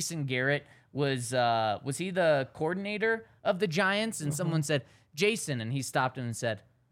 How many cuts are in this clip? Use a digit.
0